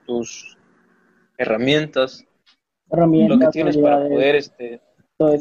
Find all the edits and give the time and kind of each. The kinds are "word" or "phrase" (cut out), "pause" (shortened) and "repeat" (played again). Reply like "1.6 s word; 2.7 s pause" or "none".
none